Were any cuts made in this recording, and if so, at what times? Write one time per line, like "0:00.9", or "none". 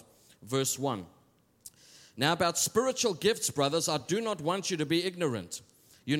none